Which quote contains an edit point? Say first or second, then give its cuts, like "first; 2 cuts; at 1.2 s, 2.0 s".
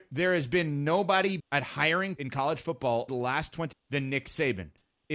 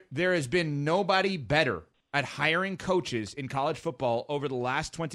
first; 4 cuts; at 1.4 s, 2.2 s, 3.1 s, 3.7 s